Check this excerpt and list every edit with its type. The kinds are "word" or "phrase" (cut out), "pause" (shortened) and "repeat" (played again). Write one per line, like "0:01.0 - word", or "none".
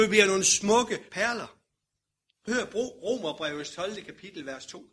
0:01.1 - word
0:02.5 - phrase